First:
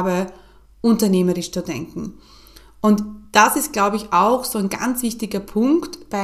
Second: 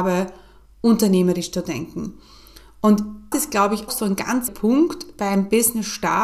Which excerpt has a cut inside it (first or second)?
second